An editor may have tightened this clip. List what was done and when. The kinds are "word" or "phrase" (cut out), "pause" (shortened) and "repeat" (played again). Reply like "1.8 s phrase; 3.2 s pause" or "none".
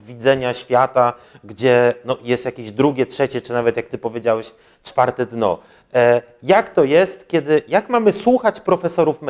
none